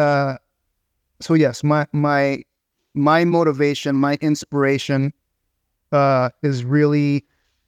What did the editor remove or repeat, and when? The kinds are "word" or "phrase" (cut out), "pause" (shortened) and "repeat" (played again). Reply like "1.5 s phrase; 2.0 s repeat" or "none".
none